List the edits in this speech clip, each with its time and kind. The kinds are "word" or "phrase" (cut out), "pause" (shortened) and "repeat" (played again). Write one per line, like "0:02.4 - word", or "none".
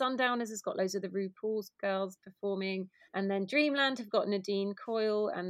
0:03.1 - pause